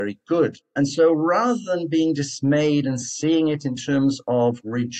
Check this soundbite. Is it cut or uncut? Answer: uncut